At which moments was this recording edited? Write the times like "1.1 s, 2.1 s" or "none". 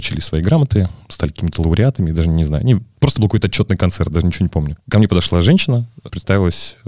none